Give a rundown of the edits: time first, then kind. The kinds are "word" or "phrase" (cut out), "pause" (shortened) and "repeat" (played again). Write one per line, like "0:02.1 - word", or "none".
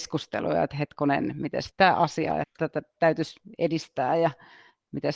0:01.7 - word
0:02.4 - word